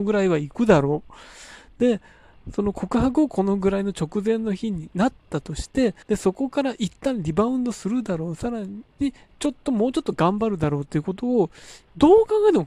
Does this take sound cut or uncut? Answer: cut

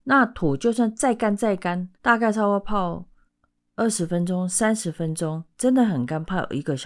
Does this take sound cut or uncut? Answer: cut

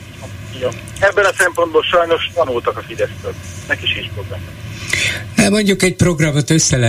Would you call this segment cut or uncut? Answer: cut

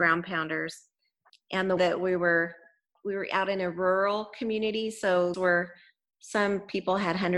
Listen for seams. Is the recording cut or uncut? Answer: cut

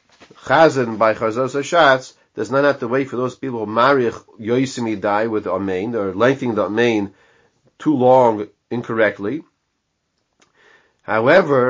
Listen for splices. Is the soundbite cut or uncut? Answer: uncut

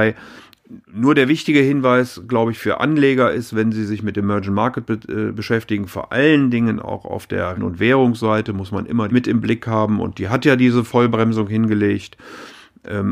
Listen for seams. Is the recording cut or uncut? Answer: cut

